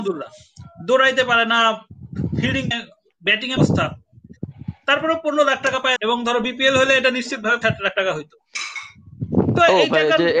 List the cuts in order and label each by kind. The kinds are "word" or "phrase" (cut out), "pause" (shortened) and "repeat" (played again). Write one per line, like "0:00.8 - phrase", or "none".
0:02.7 - phrase
0:03.6 - word
0:06.0 - word
0:07.6 - word